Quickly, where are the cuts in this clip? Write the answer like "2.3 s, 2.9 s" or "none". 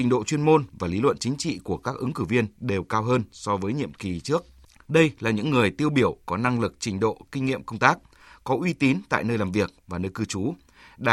none

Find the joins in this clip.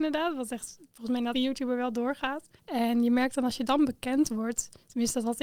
1.3 s, 2.6 s

